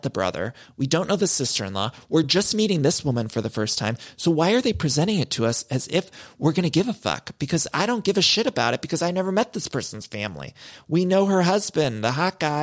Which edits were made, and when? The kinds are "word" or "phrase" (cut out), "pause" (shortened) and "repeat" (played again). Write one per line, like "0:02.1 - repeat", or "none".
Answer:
none